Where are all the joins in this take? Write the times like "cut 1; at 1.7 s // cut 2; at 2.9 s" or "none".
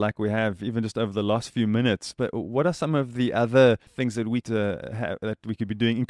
cut 1; at 3.9 s // cut 2; at 4.4 s